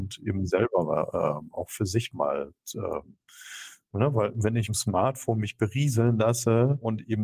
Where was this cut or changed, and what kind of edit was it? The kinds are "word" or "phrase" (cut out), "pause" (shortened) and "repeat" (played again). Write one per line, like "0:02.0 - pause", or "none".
0:04.7 - word

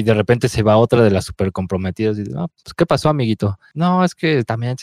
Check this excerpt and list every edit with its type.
none

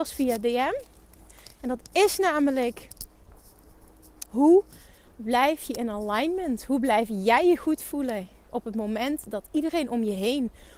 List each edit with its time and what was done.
none

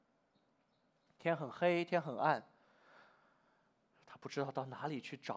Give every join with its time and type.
none

